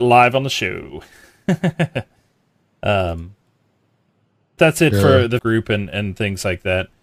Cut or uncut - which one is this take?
cut